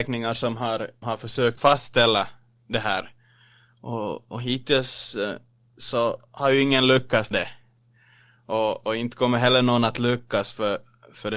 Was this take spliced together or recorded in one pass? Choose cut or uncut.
cut